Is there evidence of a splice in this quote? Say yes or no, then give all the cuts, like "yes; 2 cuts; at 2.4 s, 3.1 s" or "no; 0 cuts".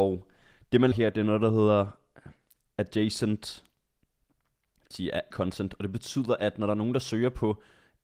yes; 3 cuts; at 0.9 s, 4.9 s, 5.3 s